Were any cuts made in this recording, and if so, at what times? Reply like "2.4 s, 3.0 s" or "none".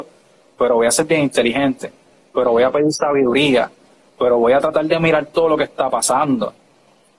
none